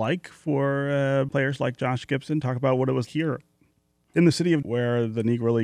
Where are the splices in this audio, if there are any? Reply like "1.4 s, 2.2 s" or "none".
1.3 s, 3.1 s, 4.6 s